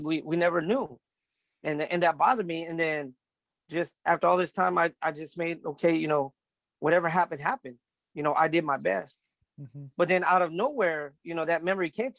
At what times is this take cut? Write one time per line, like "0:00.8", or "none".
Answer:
none